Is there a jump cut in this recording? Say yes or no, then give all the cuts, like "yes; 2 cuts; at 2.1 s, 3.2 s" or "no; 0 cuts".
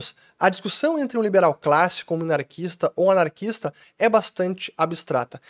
no; 0 cuts